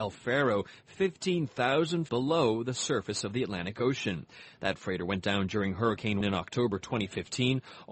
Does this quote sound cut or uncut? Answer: cut